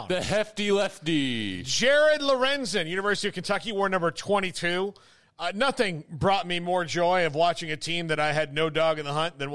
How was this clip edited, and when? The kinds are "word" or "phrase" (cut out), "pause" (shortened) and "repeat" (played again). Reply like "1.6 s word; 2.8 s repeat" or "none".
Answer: none